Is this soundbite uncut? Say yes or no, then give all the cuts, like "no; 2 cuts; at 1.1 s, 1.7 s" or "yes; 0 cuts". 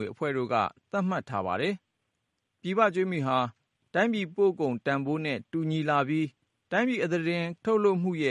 yes; 0 cuts